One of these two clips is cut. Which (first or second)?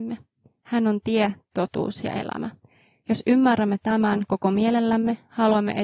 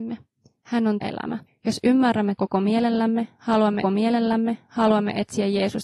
second